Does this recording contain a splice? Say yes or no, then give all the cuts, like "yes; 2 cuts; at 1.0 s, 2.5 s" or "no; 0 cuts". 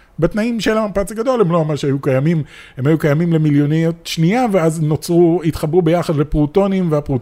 no; 0 cuts